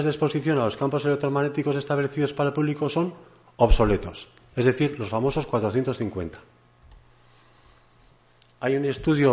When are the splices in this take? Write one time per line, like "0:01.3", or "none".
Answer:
none